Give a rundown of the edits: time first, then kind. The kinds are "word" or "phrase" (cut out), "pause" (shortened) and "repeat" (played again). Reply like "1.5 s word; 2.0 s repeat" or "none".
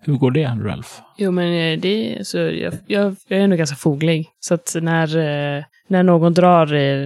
4.3 s pause; 5.7 s pause